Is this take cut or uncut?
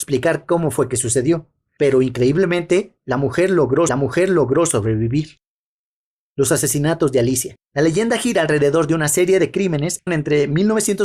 cut